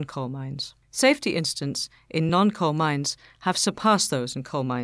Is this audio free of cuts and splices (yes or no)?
yes